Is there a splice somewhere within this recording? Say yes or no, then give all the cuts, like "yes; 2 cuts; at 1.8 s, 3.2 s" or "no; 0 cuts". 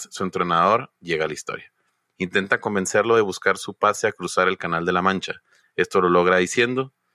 no; 0 cuts